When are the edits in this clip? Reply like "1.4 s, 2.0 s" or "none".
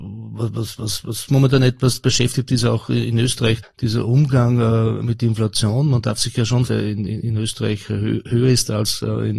1.3 s, 3.6 s, 6.7 s